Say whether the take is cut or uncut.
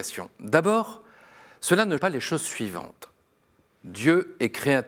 cut